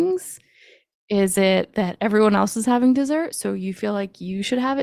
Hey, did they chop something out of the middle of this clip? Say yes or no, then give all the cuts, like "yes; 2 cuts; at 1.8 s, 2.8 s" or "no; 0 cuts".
no; 0 cuts